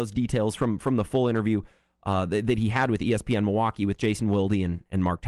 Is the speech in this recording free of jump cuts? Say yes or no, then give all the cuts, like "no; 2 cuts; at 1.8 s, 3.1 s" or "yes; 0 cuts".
yes; 0 cuts